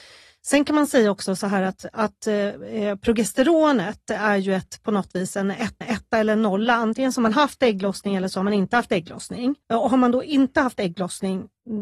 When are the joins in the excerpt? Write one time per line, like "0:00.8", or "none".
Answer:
0:05.8
0:09.6